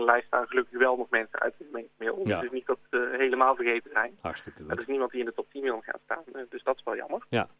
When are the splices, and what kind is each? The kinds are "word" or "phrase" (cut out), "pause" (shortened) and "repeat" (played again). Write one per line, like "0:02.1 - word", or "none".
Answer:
none